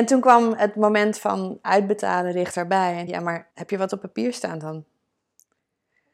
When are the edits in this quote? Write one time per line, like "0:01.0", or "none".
0:01.6
0:03.1
0:03.5